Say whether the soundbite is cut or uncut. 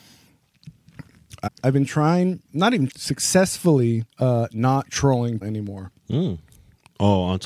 cut